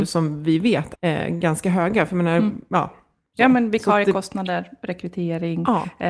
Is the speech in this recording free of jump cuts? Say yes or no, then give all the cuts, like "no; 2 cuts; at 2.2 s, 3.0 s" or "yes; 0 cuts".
no; 1 cut; at 0.9 s